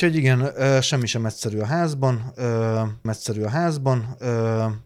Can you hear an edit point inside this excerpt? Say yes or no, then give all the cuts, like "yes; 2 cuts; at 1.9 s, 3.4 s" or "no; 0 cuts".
yes; 1 cut; at 3.1 s